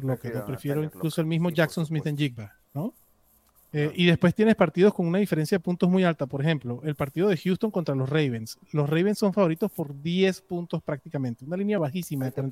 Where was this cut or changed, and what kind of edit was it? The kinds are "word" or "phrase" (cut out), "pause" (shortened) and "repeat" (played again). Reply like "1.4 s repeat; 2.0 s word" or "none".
2.6 s pause